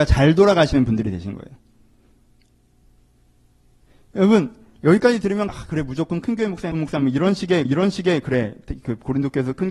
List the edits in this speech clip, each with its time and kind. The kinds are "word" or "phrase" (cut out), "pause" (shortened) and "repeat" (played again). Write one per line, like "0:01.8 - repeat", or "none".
0:05.5 - word
0:06.7 - word
0:07.7 - repeat